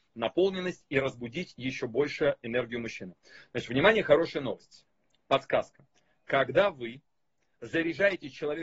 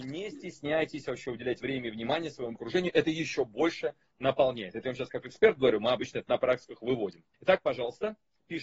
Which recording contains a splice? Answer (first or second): second